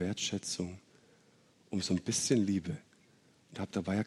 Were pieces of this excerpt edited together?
no; 0 cuts

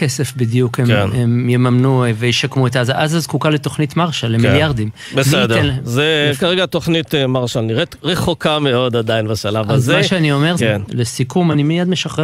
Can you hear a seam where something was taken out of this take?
yes; 1 cut; at 10.6 s

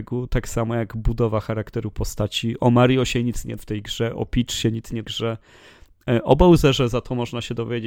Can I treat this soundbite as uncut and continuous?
no; 2 cuts; at 3.6 s, 5.0 s

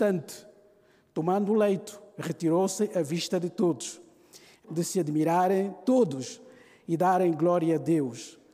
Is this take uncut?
no; 1 cut; at 4.6 s

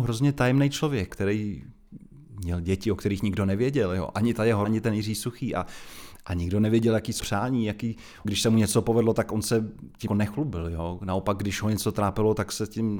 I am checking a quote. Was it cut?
yes; 5 cuts; at 1.1 s, 4.6 s, 7.2 s, 8.2 s, 10.1 s

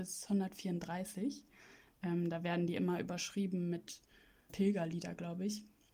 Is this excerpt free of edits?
no; 1 cut; at 4.5 s

